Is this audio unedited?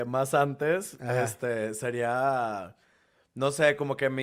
yes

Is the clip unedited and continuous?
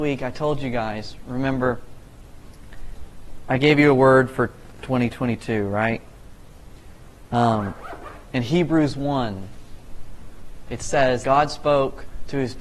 no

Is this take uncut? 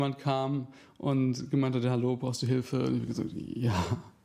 yes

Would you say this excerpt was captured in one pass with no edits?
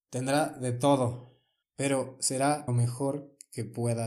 no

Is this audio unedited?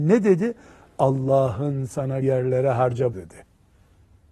no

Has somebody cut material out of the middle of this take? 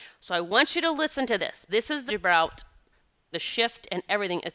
yes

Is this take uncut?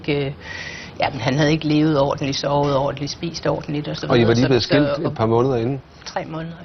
yes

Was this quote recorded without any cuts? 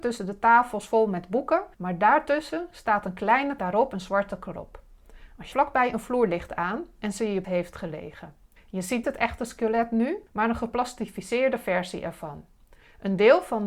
no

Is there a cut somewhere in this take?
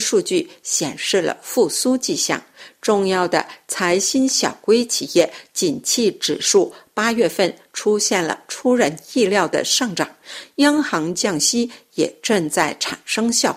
no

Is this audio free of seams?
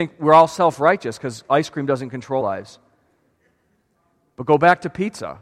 no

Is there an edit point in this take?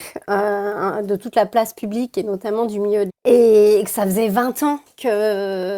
yes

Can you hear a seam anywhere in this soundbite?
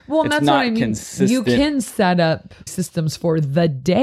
yes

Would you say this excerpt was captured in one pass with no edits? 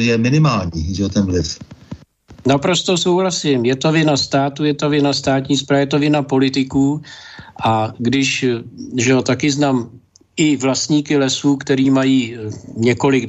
yes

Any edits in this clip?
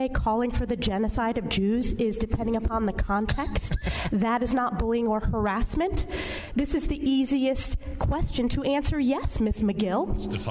no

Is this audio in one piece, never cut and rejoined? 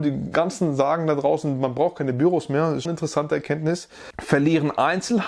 no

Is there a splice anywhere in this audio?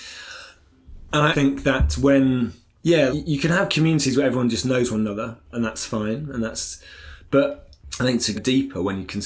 yes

